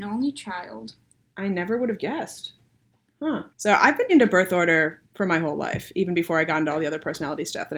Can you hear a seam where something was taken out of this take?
yes; 3 cuts; at 3.5 s, 4.1 s, 5.0 s

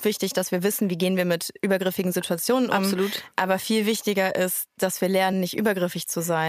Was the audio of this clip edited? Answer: no; 0 cuts

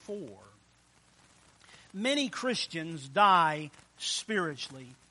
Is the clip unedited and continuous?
yes; 0 cuts

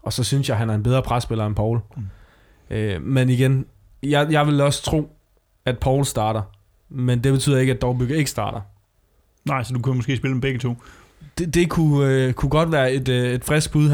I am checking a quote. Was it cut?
no; 0 cuts

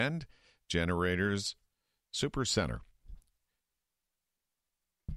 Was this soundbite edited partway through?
no; 0 cuts

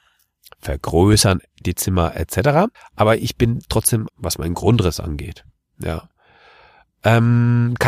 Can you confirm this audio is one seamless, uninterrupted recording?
no; 2 cuts; at 2.7 s, 4.1 s

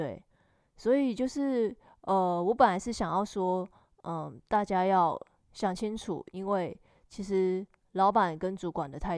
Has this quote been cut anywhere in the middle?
no; 0 cuts

